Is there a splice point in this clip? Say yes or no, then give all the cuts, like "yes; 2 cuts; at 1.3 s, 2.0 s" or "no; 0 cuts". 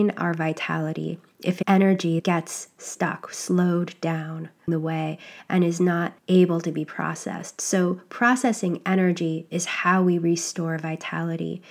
yes; 2 cuts; at 4.7 s, 6.2 s